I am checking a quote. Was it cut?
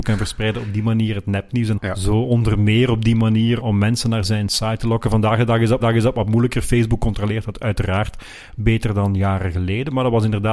yes; 3 cuts; at 1.8 s, 3.6 s, 5.8 s

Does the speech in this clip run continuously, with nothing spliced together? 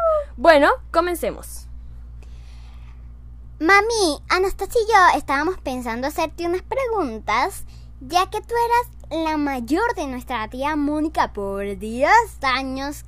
yes; 0 cuts

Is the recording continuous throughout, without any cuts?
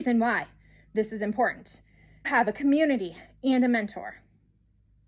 no; 1 cut; at 2.2 s

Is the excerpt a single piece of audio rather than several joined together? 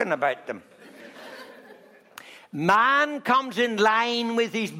yes; 0 cuts

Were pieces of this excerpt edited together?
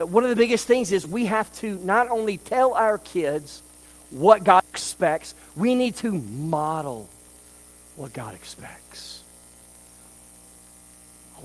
no; 0 cuts

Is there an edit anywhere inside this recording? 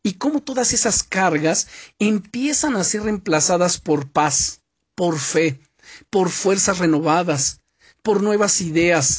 no; 0 cuts

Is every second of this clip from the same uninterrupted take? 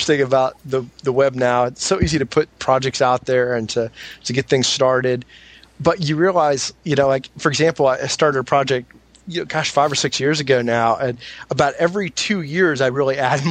yes; 0 cuts

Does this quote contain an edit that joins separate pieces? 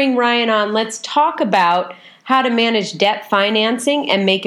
no; 0 cuts

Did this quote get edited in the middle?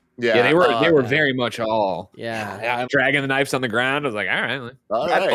yes; 1 cut; at 2.9 s

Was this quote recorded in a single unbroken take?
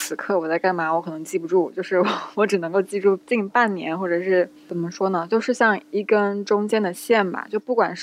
no; 1 cut; at 4.6 s

